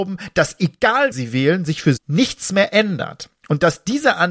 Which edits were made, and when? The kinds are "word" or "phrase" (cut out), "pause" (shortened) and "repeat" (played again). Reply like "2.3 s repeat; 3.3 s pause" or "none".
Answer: 1.1 s word; 2.0 s word